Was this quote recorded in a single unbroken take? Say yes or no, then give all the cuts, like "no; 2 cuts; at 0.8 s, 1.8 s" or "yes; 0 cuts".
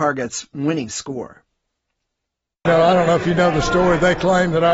yes; 0 cuts